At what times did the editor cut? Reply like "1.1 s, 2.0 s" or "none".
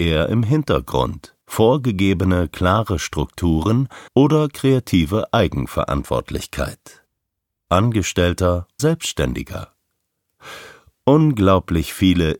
1.4 s, 4.1 s, 8.8 s